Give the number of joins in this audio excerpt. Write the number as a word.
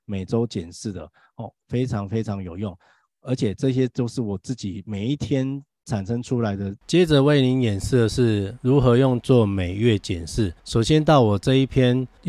two